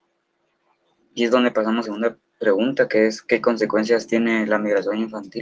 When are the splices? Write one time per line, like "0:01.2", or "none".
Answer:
0:01.2
0:01.8